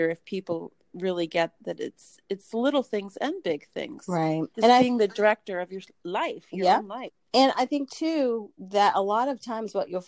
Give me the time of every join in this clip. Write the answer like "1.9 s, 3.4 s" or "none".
1.6 s, 4.5 s, 7.2 s